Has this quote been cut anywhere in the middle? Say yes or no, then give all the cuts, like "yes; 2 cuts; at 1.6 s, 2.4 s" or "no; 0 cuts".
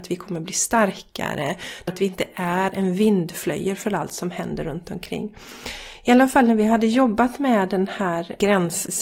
yes; 1 cut; at 1.9 s